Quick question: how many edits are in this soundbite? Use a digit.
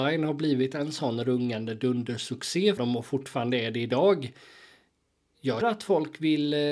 2